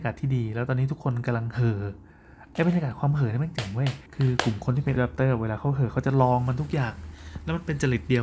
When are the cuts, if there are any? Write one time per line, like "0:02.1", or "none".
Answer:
0:04.1
0:05.0